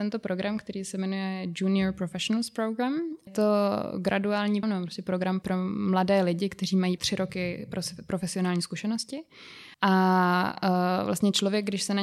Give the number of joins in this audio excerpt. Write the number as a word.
five